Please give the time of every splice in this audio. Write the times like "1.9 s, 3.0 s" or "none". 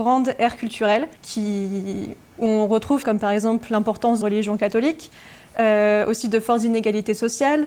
1.2 s, 3.0 s, 4.2 s

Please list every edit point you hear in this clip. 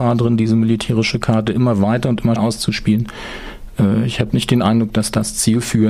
2.4 s

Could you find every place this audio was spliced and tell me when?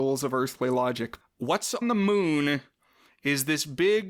1.2 s, 1.8 s

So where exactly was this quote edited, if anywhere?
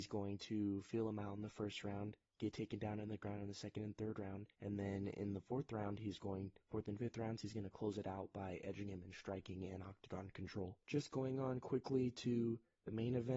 2.3 s, 4.5 s, 10.8 s

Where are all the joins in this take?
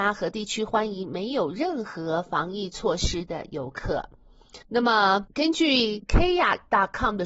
4.6 s

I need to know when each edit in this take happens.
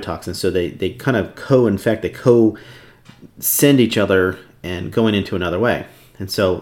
none

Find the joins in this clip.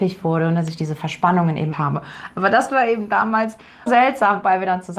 1.7 s, 3.9 s

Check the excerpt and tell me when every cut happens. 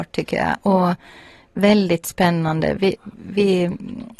none

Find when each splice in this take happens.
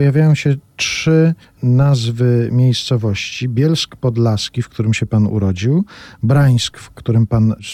1.4 s

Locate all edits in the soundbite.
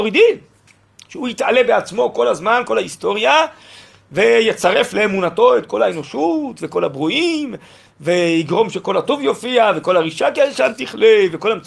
none

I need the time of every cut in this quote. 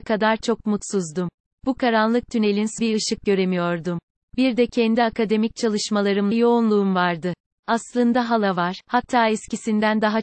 2.8 s, 6.3 s

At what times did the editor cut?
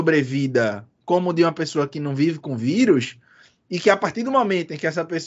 none

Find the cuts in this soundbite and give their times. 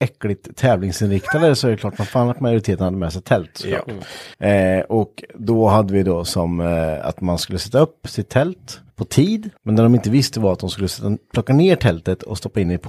4.3 s, 8.9 s, 9.6 s

